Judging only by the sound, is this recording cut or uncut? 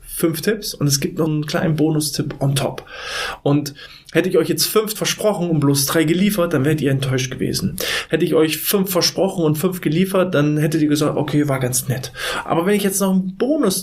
cut